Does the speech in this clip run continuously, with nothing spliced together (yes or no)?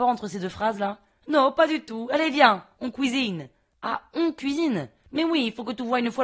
yes